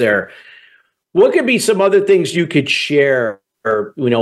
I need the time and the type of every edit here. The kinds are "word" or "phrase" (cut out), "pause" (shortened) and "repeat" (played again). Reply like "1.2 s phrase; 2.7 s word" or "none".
none

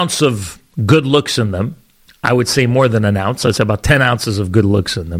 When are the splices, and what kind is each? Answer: none

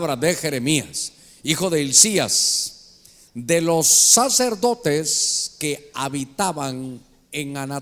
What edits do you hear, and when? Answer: none

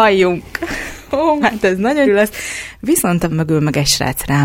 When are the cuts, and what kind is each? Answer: 1.4 s word; 2.1 s word; 3.3 s word

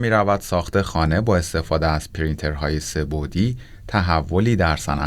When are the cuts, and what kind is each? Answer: none

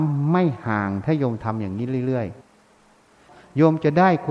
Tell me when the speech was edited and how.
2.4 s pause

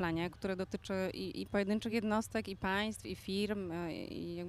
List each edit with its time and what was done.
none

